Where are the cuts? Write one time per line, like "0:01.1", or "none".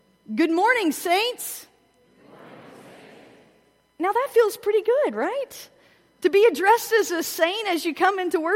none